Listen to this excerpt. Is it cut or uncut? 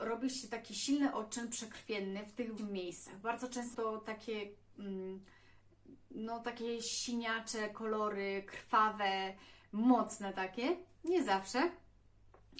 cut